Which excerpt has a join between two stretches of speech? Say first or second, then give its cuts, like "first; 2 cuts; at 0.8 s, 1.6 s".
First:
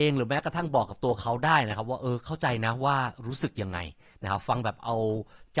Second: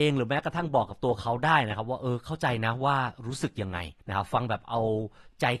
second; 1 cut; at 4.0 s